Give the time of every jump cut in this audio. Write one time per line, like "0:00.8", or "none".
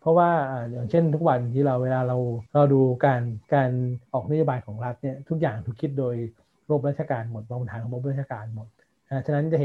0:02.5
0:03.4
0:04.1